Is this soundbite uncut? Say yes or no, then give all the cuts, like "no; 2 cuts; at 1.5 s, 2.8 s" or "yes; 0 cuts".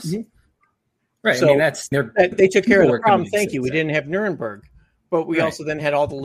no; 2 cuts; at 1.9 s, 2.3 s